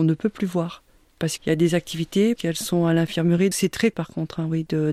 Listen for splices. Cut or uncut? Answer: cut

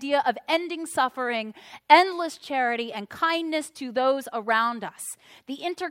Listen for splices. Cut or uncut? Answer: uncut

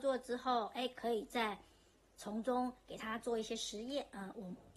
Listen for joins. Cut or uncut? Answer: uncut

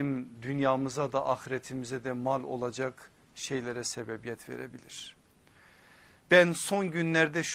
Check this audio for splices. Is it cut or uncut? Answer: uncut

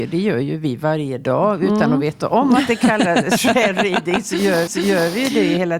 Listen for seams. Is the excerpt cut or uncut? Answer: cut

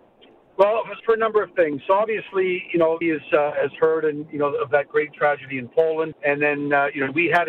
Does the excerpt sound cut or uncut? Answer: cut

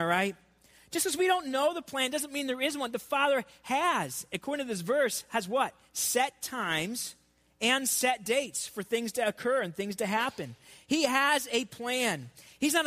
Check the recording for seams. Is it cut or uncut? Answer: uncut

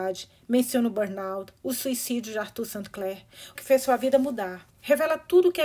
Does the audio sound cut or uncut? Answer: cut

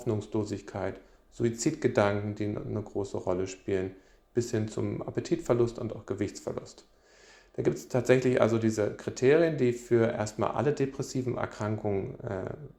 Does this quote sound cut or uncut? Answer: uncut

